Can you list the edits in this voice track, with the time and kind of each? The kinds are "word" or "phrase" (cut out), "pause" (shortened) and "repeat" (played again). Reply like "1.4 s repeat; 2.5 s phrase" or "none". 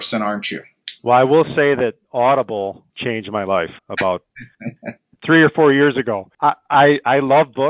1.0 s pause; 2.9 s pause; 3.8 s pause; 6.3 s pause